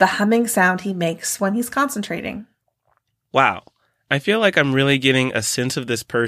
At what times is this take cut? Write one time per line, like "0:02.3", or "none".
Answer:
none